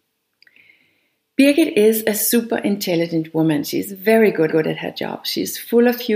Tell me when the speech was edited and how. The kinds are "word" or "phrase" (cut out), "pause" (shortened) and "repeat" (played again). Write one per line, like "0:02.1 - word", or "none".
0:04.5 - repeat